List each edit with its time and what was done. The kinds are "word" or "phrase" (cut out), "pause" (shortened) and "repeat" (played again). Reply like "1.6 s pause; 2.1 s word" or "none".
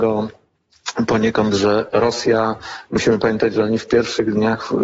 none